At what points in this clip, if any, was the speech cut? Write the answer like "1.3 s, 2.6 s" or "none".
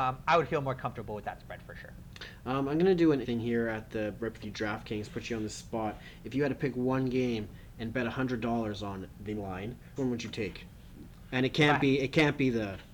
3.2 s, 4.4 s, 9.4 s, 10.0 s

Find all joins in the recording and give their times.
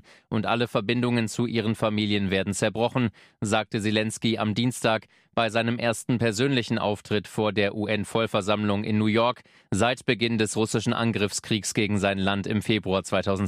none

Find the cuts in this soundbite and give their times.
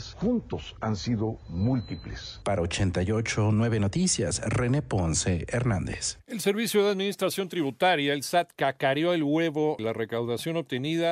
9.8 s

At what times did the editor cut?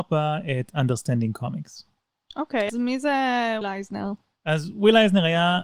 2.7 s, 3.6 s

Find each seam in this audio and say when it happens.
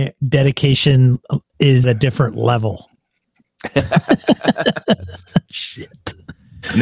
1.8 s

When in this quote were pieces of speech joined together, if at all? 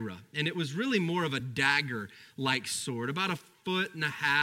none

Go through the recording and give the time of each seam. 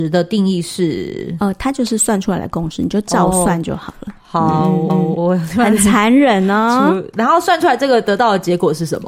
4.9 s

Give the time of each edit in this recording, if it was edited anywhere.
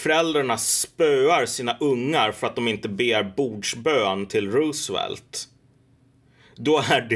none

